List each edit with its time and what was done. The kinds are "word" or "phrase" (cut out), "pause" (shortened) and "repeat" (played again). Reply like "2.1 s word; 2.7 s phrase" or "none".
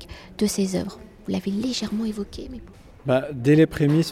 none